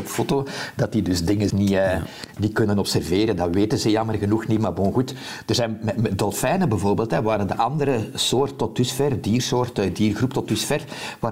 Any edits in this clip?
yes; 1 cut; at 1.5 s

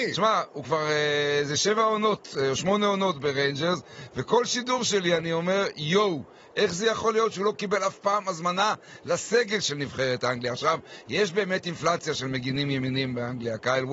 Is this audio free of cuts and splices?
yes; 0 cuts

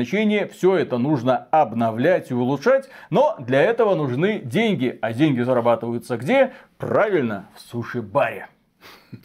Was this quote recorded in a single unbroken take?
yes; 0 cuts

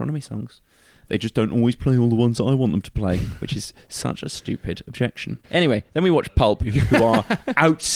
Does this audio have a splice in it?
yes; 1 cut; at 5.4 s

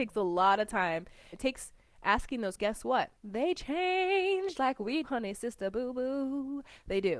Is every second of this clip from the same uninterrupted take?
no; 5 cuts; at 1.3 s, 2.6 s, 3.2 s, 4.5 s, 5.0 s

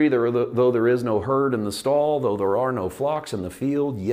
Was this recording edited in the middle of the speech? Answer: no; 0 cuts

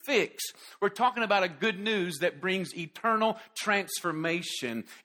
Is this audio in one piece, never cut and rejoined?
yes; 0 cuts

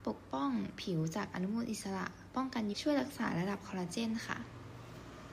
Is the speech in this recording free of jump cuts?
no; 1 cut; at 2.7 s

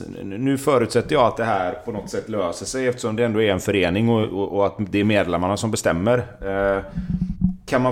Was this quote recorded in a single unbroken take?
yes; 0 cuts

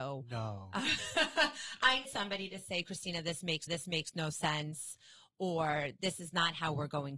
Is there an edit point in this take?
yes; 2 cuts; at 2.0 s, 3.7 s

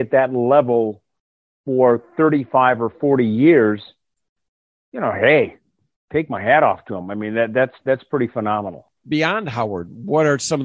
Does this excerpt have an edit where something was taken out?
no; 0 cuts

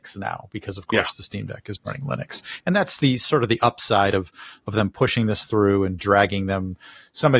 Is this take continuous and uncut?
yes; 0 cuts

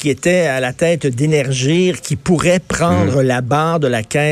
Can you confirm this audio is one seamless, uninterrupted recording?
yes; 0 cuts

